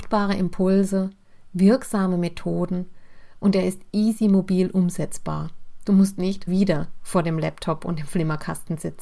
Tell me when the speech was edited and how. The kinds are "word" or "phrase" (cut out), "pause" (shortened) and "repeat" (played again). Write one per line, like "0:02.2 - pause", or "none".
0:06.5 - word